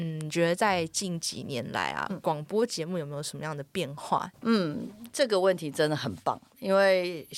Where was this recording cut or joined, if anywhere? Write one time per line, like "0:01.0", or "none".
0:04.3